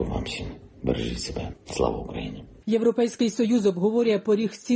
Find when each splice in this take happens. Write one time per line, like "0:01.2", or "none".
0:01.6